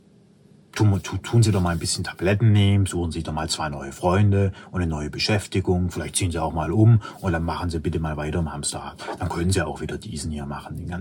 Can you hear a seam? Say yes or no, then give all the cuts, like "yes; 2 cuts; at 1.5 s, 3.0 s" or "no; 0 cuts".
no; 0 cuts